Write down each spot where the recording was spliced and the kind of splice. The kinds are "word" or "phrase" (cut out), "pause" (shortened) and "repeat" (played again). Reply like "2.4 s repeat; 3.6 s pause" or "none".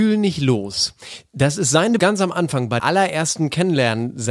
2.0 s word; 2.8 s word